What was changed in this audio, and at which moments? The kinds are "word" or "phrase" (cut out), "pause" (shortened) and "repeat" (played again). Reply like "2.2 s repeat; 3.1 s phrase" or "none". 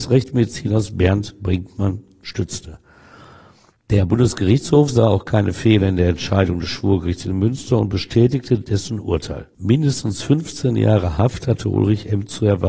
none